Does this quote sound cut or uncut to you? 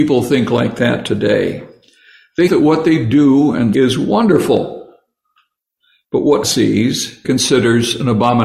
cut